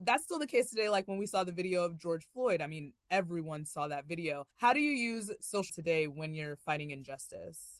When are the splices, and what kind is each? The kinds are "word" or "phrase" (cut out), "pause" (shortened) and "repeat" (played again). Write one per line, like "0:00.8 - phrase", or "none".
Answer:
0:04.5 - pause
0:05.7 - word